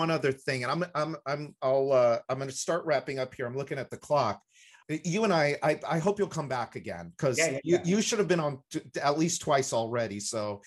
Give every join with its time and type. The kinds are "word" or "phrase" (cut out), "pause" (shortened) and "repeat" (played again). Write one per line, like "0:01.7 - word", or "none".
none